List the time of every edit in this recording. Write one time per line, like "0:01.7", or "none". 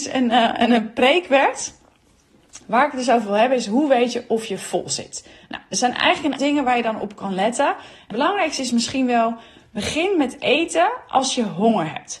0:02.6
0:06.4
0:08.1